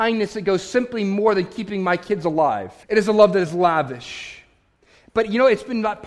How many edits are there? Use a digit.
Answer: 1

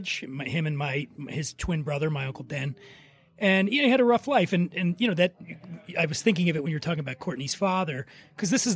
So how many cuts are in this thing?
0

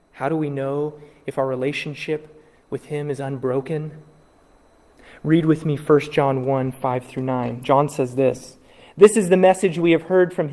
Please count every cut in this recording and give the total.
0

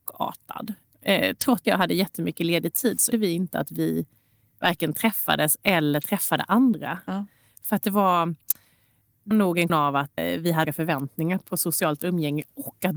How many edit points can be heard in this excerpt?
6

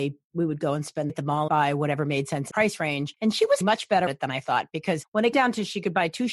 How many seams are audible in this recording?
6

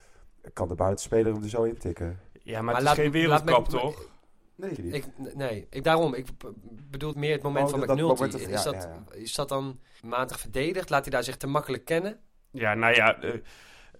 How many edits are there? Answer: 6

